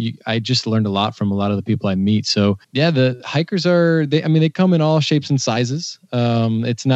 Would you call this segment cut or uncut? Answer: cut